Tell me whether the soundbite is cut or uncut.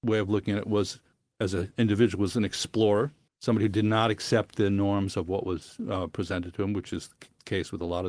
cut